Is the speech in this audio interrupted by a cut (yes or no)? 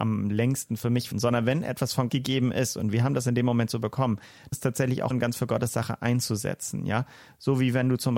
yes